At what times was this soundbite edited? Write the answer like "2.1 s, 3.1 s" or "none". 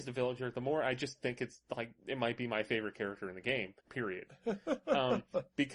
3.8 s